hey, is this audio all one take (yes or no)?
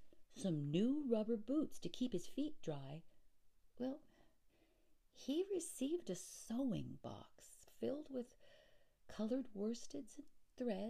yes